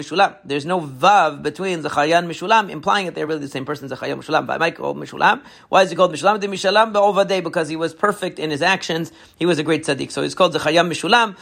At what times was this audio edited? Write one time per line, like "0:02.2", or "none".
none